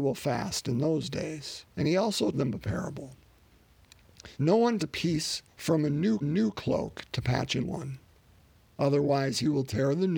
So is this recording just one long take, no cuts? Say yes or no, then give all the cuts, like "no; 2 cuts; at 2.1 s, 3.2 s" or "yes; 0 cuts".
no; 7 cuts; at 1.7 s, 2.3 s, 4.3 s, 4.8 s, 5.5 s, 6.2 s, 7.6 s